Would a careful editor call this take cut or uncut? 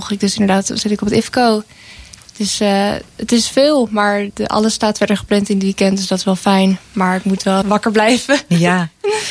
cut